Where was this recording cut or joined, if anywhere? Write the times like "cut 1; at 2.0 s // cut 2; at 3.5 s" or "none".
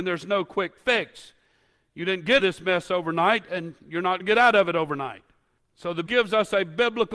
cut 1; at 2.4 s // cut 2; at 4.2 s // cut 3; at 5.6 s // cut 4; at 6.1 s